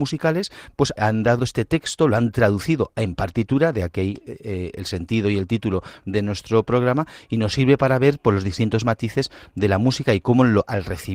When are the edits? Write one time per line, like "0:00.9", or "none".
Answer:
0:01.0
0:01.4
0:04.7